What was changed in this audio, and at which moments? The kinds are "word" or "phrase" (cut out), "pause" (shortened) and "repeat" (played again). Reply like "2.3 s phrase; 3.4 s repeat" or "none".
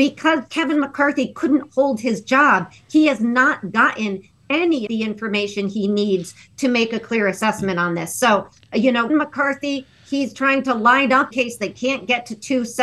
4.9 s word; 9.1 s word; 11.3 s word